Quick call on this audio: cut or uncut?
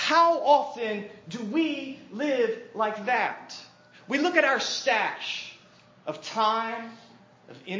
uncut